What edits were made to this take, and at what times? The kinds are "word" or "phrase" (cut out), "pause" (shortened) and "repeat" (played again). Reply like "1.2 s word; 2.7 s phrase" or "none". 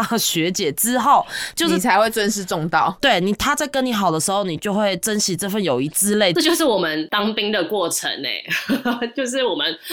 none